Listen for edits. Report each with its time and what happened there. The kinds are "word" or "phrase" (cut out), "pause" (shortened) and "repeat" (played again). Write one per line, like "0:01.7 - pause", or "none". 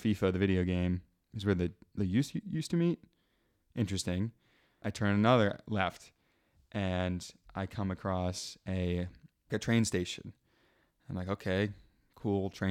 0:02.0 - word
0:09.5 - word